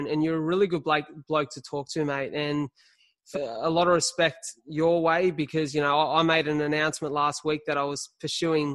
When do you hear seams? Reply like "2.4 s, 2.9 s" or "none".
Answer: 3.3 s, 4.6 s